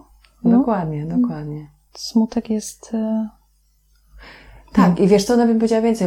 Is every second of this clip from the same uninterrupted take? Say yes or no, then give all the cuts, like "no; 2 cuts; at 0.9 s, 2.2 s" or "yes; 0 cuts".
yes; 0 cuts